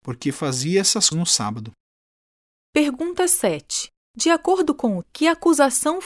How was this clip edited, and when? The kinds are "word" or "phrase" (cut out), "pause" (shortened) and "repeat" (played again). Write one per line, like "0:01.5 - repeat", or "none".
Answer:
0:01.1 - word
0:04.0 - pause
0:05.0 - word

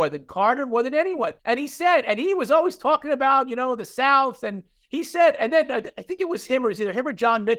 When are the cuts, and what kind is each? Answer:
0:01.4 - pause

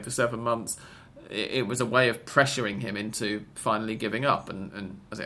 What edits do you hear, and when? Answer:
none

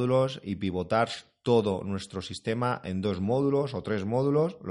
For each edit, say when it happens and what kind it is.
none

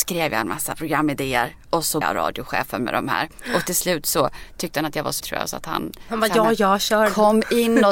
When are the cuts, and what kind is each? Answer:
0:02.0 - word
0:05.2 - word

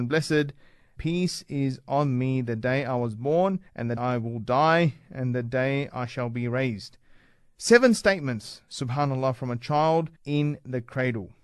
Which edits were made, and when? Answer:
0:01.0 - word
0:03.7 - pause
0:04.0 - word
0:10.2 - pause

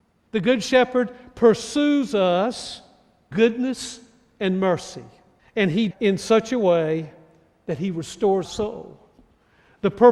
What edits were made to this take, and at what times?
0:03.3 - word
0:05.4 - pause
0:05.9 - phrase
0:08.4 - word

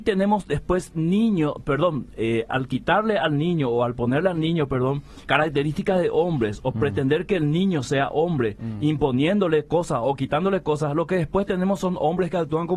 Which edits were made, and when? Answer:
0:02.5 - word
0:05.2 - word

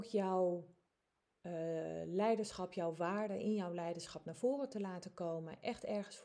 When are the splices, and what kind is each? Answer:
none

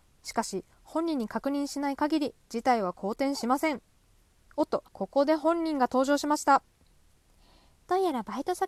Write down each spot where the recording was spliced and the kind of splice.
0:04.9 - pause

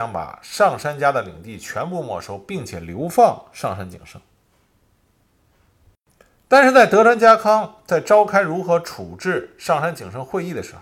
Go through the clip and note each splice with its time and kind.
none

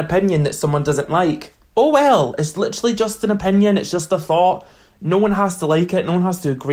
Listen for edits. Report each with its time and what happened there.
none

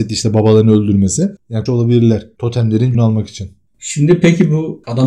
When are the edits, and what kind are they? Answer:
0:01.7 - phrase
0:02.9 - word

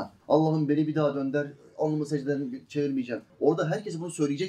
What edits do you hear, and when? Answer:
none

